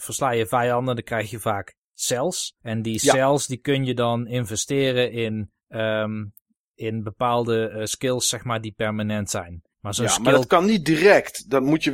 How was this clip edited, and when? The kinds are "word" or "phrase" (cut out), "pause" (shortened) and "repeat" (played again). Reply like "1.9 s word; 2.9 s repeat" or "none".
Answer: 2.6 s pause; 5.6 s pause; 9.7 s pause